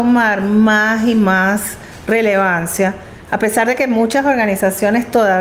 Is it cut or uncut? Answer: uncut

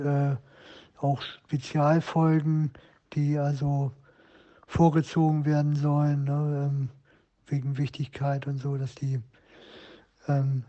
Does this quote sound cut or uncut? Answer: uncut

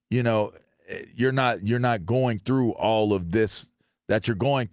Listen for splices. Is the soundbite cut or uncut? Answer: uncut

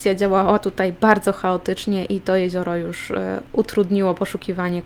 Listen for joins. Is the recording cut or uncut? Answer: uncut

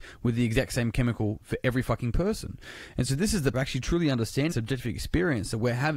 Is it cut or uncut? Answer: cut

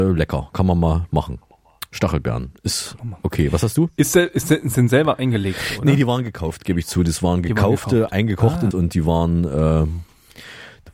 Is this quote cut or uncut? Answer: cut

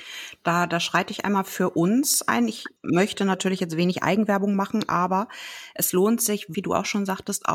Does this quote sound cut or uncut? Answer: cut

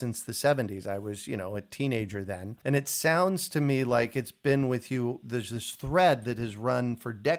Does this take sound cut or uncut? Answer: uncut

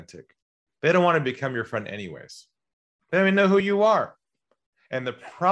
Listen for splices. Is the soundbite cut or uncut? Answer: uncut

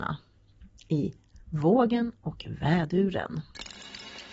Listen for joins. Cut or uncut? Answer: uncut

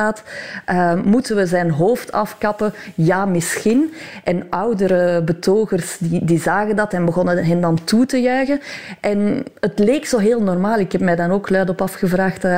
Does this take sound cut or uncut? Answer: uncut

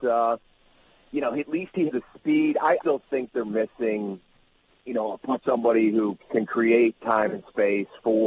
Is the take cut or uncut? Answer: cut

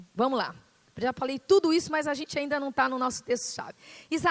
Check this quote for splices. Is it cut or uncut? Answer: uncut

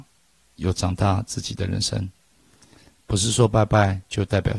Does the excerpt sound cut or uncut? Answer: uncut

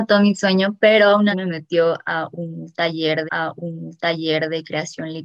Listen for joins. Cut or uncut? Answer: cut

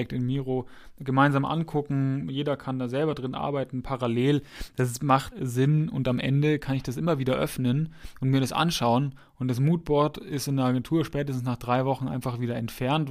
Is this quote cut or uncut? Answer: cut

